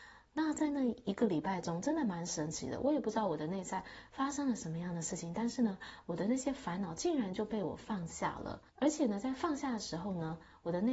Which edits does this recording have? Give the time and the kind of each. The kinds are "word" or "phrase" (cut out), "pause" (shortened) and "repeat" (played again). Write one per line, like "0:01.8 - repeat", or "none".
0:08.7 - pause

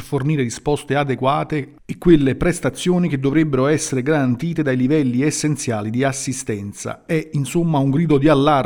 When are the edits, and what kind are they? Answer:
none

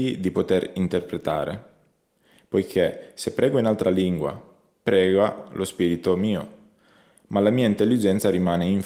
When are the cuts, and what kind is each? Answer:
none

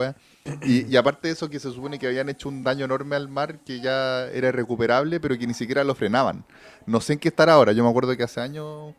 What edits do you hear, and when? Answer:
none

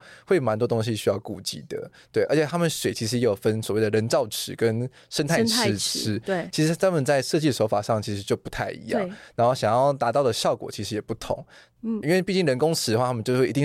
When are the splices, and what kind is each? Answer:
0:12.0 - word

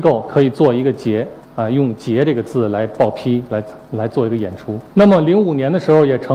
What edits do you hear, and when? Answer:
0:01.4 - pause
0:04.9 - pause

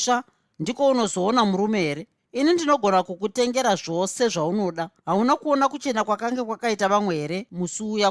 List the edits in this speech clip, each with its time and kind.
0:02.2 - pause
0:05.0 - pause

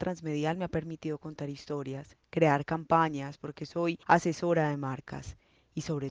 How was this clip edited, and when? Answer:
0:04.0 - pause

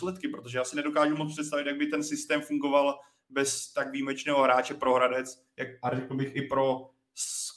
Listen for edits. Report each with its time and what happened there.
none

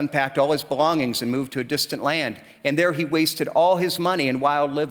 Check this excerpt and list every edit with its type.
none

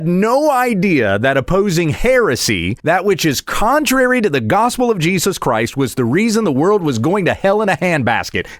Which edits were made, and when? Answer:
0:02.8 - pause

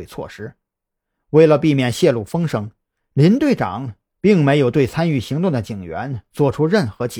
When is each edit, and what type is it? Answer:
none

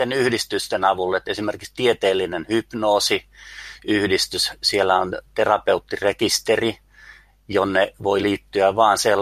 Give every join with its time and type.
none

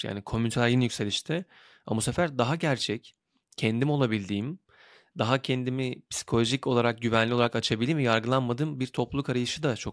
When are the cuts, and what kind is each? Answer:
none

